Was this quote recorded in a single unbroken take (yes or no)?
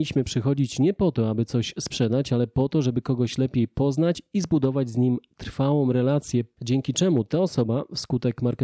yes